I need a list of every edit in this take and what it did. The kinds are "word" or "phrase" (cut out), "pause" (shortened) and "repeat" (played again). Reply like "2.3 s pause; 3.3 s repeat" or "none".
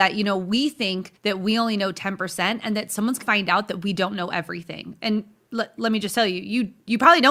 1.2 s pause; 3.2 s word